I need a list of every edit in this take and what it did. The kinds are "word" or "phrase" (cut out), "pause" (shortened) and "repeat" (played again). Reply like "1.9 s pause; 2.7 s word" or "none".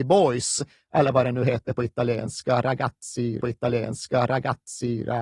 3.4 s repeat